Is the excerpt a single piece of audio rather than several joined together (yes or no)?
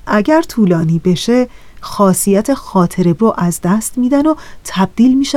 no